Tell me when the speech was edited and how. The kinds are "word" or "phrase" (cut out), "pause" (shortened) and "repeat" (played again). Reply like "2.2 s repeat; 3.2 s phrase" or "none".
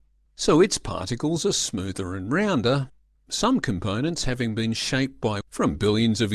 5.4 s word